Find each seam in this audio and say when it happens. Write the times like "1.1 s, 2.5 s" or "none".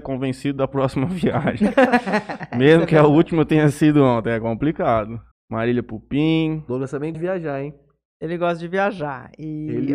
5.3 s, 7.1 s